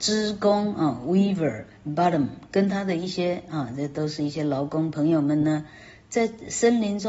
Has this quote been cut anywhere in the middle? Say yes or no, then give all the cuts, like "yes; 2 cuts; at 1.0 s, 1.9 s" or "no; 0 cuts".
no; 0 cuts